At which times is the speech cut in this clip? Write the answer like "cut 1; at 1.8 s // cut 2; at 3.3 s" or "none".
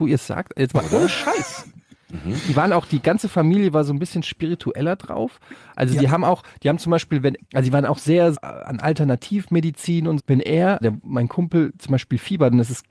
cut 1; at 7.4 s // cut 2; at 8.3 s // cut 3; at 10.2 s // cut 4; at 10.8 s